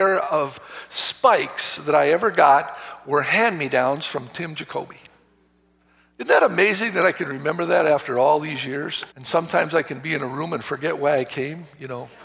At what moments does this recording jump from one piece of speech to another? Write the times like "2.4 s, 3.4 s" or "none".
9.1 s